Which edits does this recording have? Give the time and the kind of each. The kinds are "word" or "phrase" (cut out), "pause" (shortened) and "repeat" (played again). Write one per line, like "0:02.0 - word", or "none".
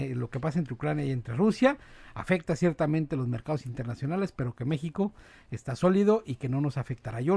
none